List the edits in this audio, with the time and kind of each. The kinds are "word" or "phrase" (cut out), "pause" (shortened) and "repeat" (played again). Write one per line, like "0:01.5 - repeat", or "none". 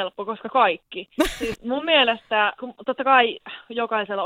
0:01.5 - word
0:02.6 - word